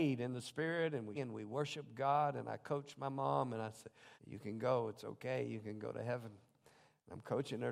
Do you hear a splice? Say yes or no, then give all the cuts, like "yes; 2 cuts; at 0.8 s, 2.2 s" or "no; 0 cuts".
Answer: yes; 2 cuts; at 1.1 s, 4.1 s